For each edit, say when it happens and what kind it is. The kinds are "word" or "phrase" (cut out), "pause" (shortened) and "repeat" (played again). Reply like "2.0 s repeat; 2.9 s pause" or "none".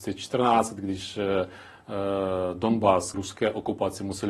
3.1 s word